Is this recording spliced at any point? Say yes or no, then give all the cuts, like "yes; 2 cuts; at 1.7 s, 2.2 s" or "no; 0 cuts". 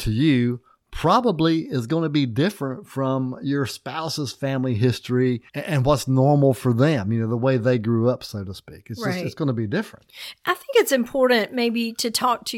yes; 1 cut; at 5.5 s